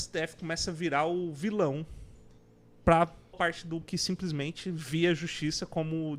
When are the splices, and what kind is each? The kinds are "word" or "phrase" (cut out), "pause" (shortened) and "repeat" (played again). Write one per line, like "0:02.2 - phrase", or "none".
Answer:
0:03.3 - word
0:03.8 - word

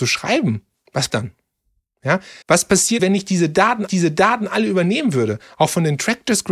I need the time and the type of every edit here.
0:01.1 - word
0:02.4 - pause
0:03.0 - word
0:03.9 - repeat

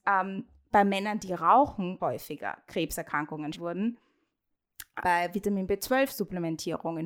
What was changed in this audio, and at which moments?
0:02.0 - word
0:03.5 - word
0:05.0 - word

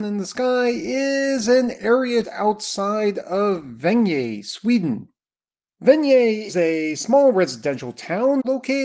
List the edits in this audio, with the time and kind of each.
0:02.2 - word
0:06.5 - word

